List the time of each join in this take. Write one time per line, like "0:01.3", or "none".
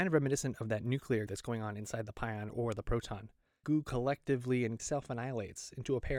0:01.3
0:02.5
0:03.6
0:04.8